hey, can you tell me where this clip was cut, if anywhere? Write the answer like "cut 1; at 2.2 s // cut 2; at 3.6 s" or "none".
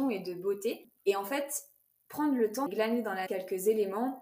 cut 1; at 1.0 s // cut 2; at 2.7 s // cut 3; at 3.3 s